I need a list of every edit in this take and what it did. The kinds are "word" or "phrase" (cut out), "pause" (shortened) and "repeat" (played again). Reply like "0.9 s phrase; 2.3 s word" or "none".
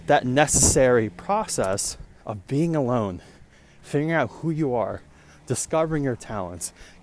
2.2 s pause